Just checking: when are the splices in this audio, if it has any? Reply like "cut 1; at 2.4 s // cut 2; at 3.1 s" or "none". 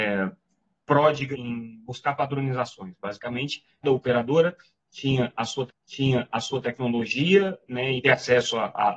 cut 1; at 1.3 s // cut 2; at 3.8 s // cut 3; at 5.7 s // cut 4; at 8.0 s

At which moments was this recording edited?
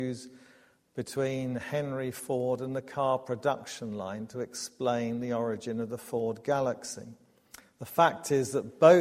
none

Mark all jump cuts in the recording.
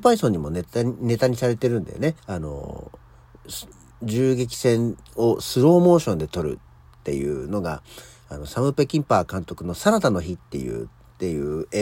cut 1; at 2.2 s

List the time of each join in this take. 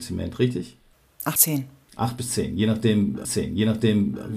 cut 1; at 1.4 s // cut 2; at 3.2 s

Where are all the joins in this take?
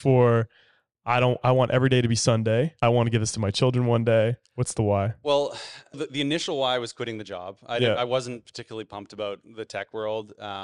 cut 1; at 2.8 s // cut 2; at 5.9 s

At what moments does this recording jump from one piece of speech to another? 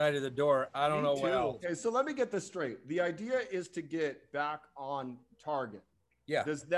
none

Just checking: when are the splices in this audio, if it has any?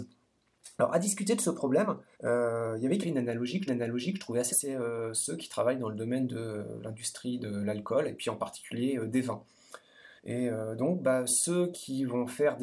cut 1; at 2.1 s // cut 2; at 3.0 s // cut 3; at 3.7 s // cut 4; at 4.5 s // cut 5; at 10.2 s

